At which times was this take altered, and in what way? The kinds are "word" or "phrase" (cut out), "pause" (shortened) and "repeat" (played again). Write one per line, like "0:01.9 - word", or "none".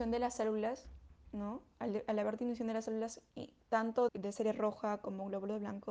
0:04.1 - word